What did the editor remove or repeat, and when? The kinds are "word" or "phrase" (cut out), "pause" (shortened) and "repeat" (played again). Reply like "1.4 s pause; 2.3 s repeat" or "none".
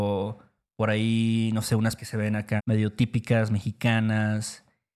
2.0 s word; 2.6 s word